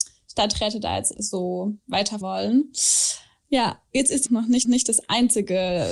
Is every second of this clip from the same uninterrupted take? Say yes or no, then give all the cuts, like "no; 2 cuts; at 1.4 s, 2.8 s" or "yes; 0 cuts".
no; 4 cuts; at 1.1 s, 2.2 s, 4.3 s, 4.6 s